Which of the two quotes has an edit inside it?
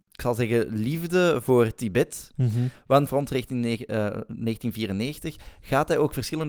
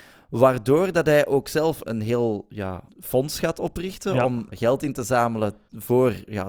second; 3 cuts; at 1.8 s, 2.9 s, 4.5 s

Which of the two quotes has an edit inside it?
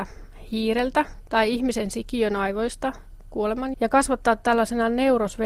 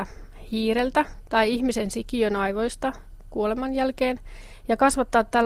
first; 1 cut; at 3.7 s

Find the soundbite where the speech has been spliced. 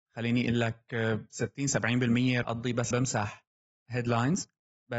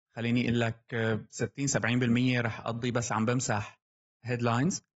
first; 2 cuts; at 2.4 s, 2.9 s

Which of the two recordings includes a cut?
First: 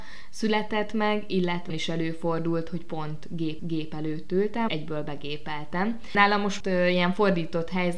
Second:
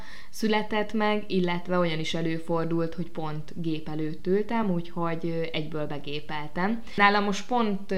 first; 4 cuts; at 1.7 s, 3.6 s, 4.7 s, 6.6 s

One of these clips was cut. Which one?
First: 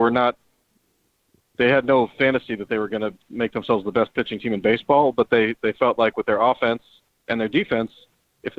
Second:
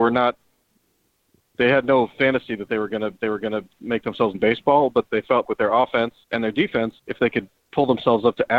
second; 6 cuts; at 3.2 s, 4.3 s, 5.1 s, 5.4 s, 6.2 s, 7.0 s

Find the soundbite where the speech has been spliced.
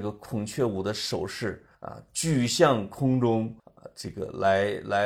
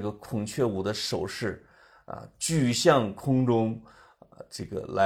first; 2 cuts; at 1.7 s, 3.6 s

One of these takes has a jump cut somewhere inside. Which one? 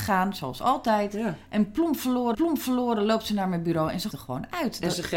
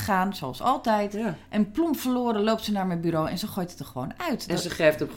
first; 2 cuts; at 2.3 s, 4.1 s

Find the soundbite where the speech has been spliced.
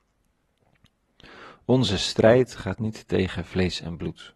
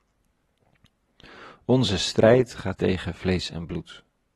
second; 1 cut; at 2.8 s

